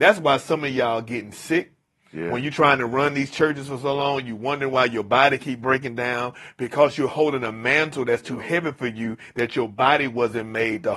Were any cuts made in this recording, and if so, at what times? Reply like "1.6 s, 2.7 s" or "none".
none

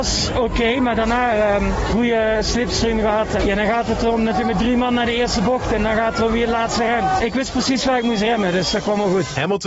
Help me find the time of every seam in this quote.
3.4 s

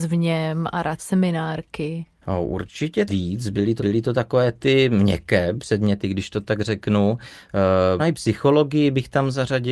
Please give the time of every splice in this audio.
1.0 s, 2.2 s, 3.1 s, 3.8 s, 8.0 s

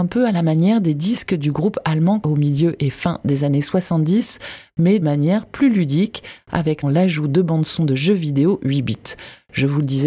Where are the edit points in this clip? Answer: 2.2 s, 5.0 s, 6.8 s

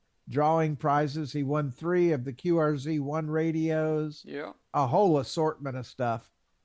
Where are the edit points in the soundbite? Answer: 4.6 s

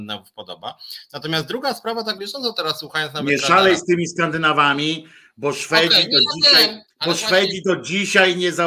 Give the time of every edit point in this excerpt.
2.2 s, 6.9 s

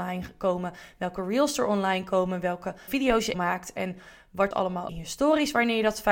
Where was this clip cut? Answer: 2.9 s, 3.3 s, 4.5 s, 4.9 s

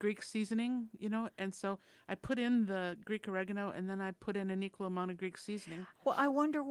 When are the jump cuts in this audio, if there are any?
none

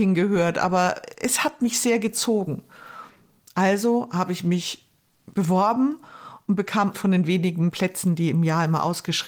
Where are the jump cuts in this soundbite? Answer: 6.9 s, 7.7 s

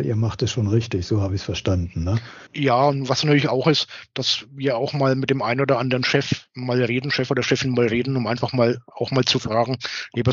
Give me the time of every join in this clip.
2.5 s

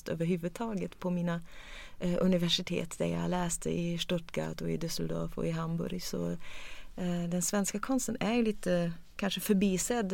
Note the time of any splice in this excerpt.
none

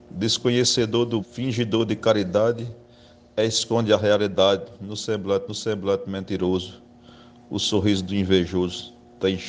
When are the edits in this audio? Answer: 1.2 s, 5.5 s

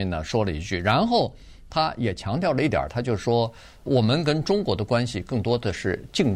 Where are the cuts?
3.9 s

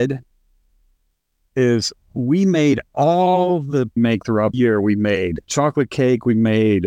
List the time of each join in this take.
4.0 s, 4.5 s, 5.4 s

